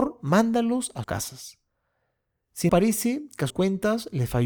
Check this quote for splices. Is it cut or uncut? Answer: cut